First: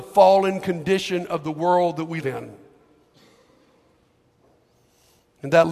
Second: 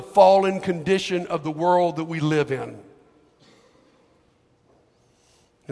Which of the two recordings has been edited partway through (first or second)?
first